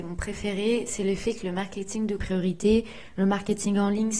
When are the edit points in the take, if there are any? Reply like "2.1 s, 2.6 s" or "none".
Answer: 2.2 s